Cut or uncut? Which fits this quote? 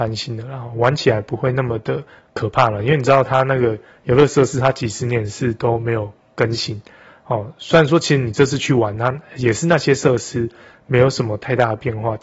uncut